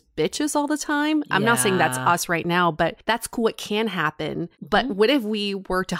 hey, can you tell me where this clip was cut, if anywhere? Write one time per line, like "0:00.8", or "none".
none